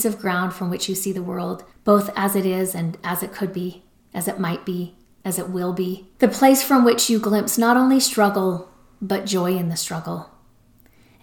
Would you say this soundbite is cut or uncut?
cut